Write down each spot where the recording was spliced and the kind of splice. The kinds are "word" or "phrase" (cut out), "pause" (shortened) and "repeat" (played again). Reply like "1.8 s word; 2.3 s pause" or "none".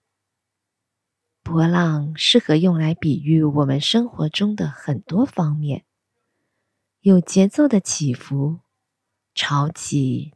none